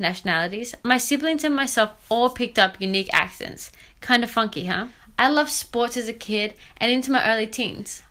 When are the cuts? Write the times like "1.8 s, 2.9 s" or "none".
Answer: none